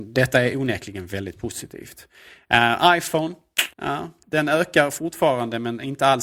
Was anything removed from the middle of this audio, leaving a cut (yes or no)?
yes